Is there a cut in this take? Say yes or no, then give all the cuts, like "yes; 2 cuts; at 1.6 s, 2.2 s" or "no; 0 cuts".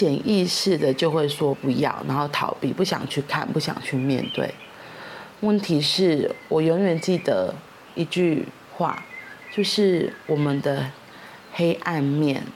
no; 0 cuts